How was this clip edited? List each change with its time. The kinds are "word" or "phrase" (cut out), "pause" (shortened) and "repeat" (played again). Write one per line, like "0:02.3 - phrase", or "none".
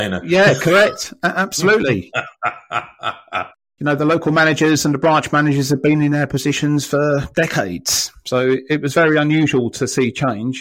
none